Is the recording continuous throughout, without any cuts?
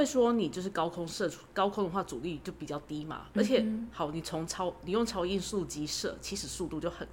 yes; 0 cuts

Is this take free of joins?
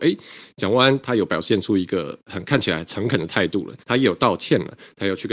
no; 1 cut; at 3.8 s

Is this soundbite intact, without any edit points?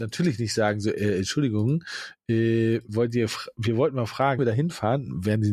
no; 1 cut; at 4.4 s

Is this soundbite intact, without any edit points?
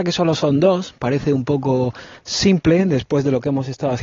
yes; 0 cuts

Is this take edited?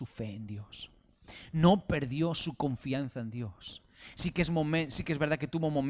no; 0 cuts

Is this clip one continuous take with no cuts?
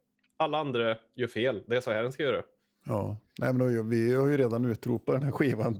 yes; 0 cuts

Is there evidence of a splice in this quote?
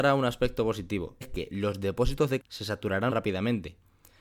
yes; 3 cuts; at 1.2 s, 2.4 s, 3.1 s

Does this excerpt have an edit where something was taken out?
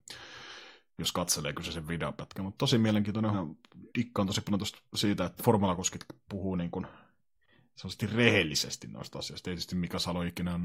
yes; 4 cuts; at 3.3 s, 3.9 s, 4.9 s, 5.4 s

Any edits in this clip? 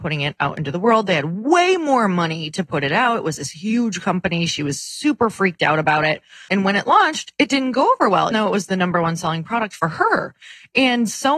yes; 2 cuts; at 6.5 s, 8.3 s

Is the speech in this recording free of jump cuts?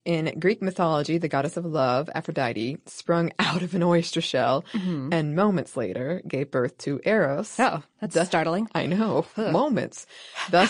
yes; 0 cuts

